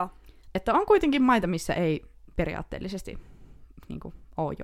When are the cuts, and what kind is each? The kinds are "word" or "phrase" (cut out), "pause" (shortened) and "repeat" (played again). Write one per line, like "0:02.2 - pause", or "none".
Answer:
none